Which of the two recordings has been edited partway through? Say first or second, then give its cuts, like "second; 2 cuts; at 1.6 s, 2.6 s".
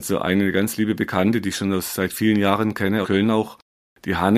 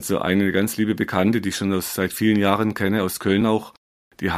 first; 1 cut; at 3.0 s